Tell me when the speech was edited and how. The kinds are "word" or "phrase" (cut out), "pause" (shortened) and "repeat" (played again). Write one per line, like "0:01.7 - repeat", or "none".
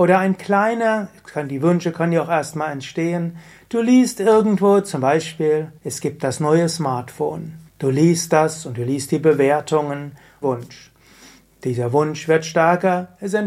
0:05.8 - pause
0:07.7 - pause
0:10.4 - phrase